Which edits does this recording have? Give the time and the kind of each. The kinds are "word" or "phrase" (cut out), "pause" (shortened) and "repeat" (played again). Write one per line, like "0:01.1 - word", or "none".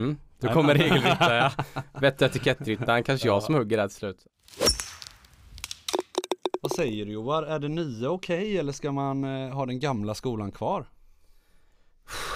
none

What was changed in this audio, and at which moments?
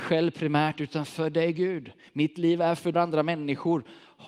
0:02.9 - phrase

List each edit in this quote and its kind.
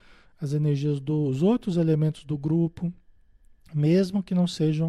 none

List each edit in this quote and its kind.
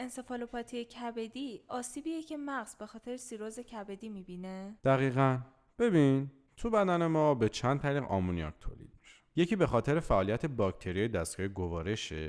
0:04.8 - pause

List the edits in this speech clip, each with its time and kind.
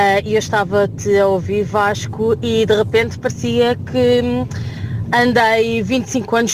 none

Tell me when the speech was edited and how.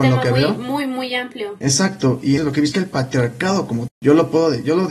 0:02.4 - word
0:02.7 - word
0:03.9 - word

